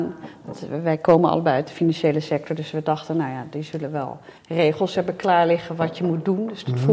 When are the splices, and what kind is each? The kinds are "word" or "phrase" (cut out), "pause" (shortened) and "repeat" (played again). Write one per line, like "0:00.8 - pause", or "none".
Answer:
0:04.4 - pause

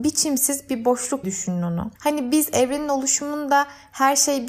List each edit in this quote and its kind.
0:01.2 - word
0:02.0 - pause

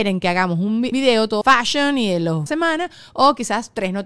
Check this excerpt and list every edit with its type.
0:00.9 - word
0:01.4 - phrase
0:02.5 - phrase

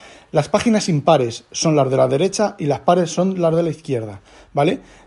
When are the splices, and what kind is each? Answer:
none

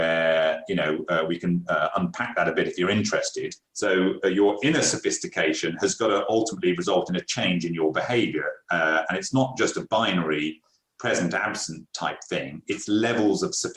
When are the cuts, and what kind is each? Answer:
0:03.6 - pause

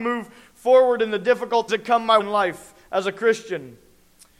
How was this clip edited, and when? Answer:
0:01.7 - word
0:02.2 - word

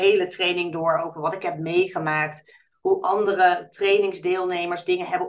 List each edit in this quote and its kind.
none

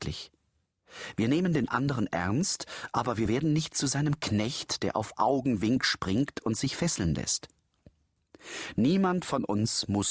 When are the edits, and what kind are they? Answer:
none

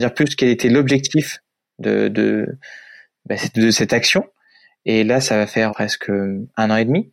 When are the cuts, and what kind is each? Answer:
0:05.7 - word

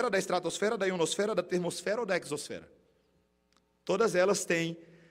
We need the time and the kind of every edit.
none

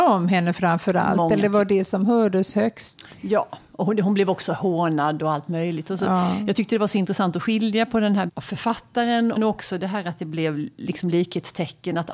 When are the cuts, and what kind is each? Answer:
0:08.3 - phrase
0:09.4 - word

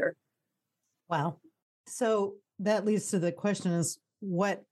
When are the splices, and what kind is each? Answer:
none

